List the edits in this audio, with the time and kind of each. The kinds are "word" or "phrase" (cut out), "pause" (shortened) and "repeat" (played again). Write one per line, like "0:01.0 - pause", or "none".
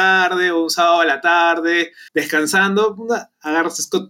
0:02.1 - pause